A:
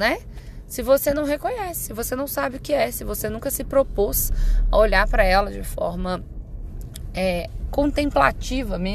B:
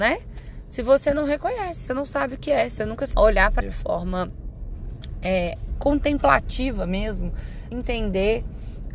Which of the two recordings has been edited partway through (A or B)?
B